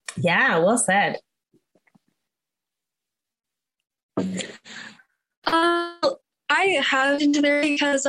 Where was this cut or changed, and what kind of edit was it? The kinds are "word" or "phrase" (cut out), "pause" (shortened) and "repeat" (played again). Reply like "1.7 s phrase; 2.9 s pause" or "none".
7.2 s word